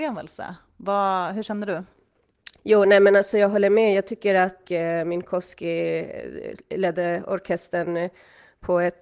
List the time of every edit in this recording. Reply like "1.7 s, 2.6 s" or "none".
2.6 s, 4.6 s